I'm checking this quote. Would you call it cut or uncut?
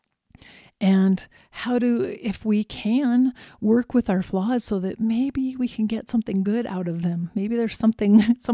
uncut